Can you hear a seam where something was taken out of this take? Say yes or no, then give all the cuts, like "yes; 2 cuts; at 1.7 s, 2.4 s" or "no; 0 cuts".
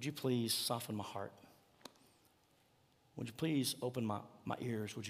no; 0 cuts